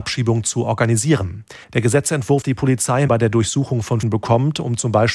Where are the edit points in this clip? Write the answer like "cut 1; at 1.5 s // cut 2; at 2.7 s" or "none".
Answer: cut 1; at 1.6 s // cut 2; at 2.4 s // cut 3; at 3.1 s // cut 4; at 4.0 s

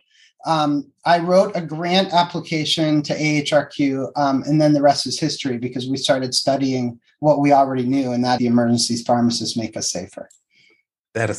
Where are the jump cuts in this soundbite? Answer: cut 1; at 8.4 s

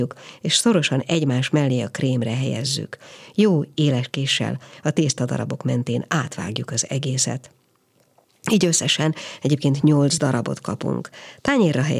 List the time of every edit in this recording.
none

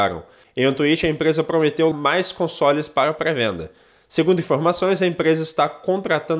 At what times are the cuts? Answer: cut 1; at 1.9 s

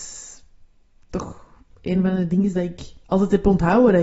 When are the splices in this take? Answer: cut 1; at 3.0 s

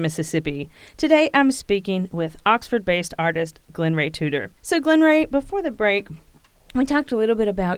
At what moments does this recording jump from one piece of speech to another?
cut 1; at 4.6 s

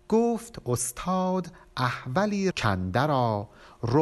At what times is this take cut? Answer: cut 1; at 2.5 s

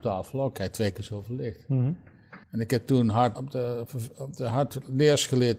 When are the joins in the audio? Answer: cut 1; at 2.4 s // cut 2; at 3.3 s

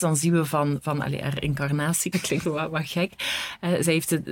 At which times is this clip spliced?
cut 1; at 2.1 s // cut 2; at 2.4 s

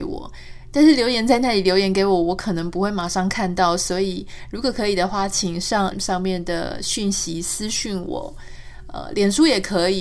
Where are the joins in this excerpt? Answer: cut 1; at 5.9 s

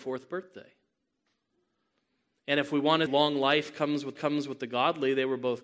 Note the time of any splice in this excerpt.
cut 1; at 3.1 s // cut 2; at 4.2 s

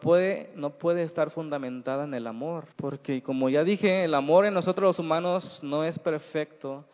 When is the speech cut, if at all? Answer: cut 1; at 2.7 s

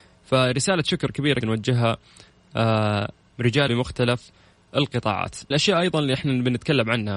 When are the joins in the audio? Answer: cut 1; at 1.4 s // cut 2; at 3.3 s // cut 3; at 3.7 s // cut 4; at 5.5 s

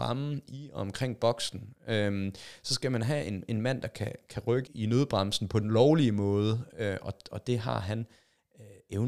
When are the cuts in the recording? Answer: cut 1; at 4.7 s

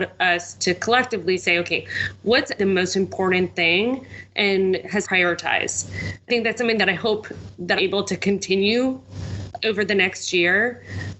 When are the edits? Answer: cut 1; at 2.6 s // cut 2; at 5.0 s // cut 3; at 6.3 s // cut 4; at 7.8 s // cut 5; at 9.6 s

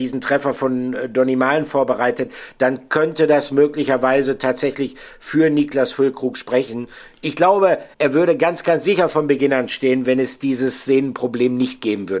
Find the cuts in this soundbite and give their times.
cut 1; at 7.9 s

